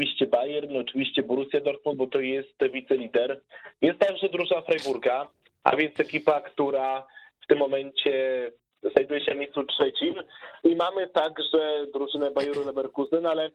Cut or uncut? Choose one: uncut